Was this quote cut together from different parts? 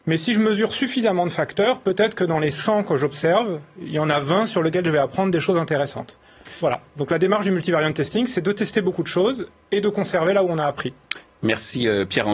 no; 0 cuts

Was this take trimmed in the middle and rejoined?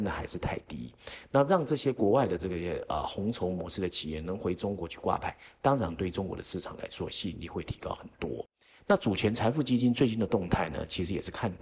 no; 0 cuts

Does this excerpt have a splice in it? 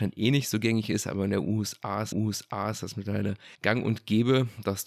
yes; 2 cuts; at 2.1 s, 3.5 s

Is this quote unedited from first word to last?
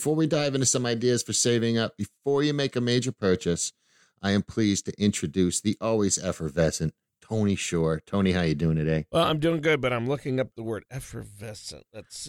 yes; 0 cuts

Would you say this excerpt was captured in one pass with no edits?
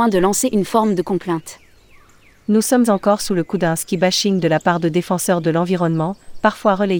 yes; 0 cuts

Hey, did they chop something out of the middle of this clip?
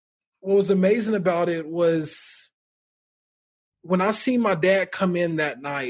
no; 0 cuts

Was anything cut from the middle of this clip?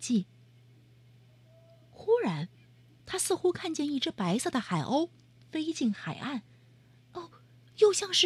no; 0 cuts

